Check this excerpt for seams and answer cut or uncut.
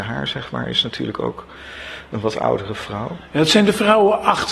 uncut